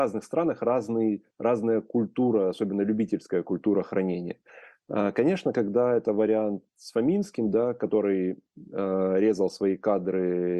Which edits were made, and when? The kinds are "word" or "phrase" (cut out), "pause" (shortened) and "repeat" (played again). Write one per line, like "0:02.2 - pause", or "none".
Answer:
none